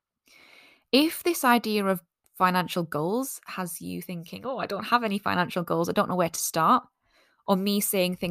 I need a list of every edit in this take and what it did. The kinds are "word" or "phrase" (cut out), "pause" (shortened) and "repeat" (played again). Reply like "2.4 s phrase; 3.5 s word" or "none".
none